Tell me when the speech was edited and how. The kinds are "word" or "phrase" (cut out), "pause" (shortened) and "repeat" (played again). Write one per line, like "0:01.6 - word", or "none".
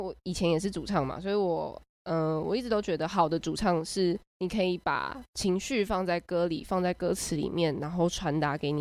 0:04.3 - pause